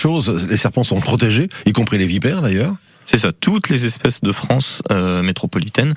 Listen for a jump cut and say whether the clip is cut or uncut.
uncut